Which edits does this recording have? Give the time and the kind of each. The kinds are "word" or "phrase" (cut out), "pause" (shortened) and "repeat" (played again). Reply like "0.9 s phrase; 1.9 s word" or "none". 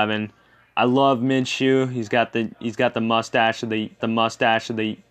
4.0 s repeat

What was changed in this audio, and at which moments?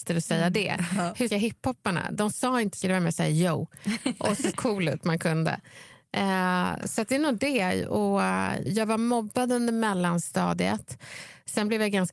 1.3 s word; 2.8 s word; 4.5 s phrase; 8.7 s word

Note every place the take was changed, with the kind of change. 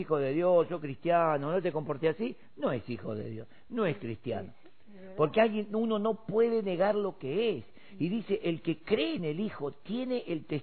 none

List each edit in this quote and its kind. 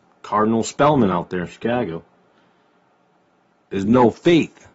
none

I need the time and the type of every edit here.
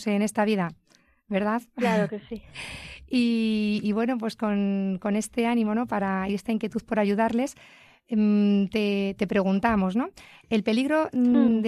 none

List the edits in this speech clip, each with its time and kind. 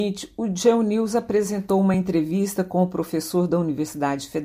none

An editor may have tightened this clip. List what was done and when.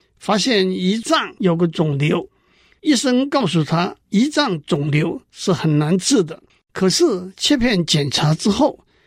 4.0 s pause; 5.2 s pause; 6.5 s pause

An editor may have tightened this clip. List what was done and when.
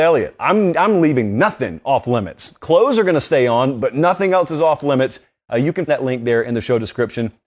5.9 s word

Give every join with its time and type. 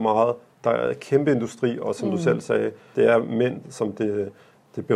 2.9 s word; 3.6 s word

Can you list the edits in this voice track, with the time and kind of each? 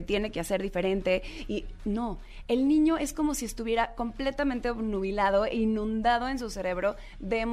none

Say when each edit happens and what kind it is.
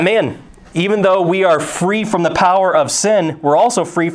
none

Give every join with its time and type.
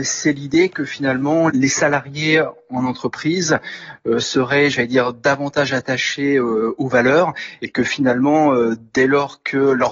1.5 s phrase

